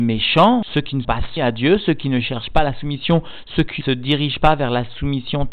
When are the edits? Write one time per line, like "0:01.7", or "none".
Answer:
0:01.0
0:01.4
0:03.8